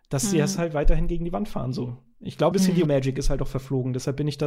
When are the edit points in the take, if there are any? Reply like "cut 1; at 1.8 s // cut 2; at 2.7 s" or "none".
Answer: cut 1; at 2.5 s // cut 2; at 2.9 s